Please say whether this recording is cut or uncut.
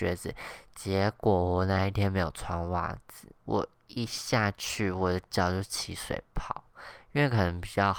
cut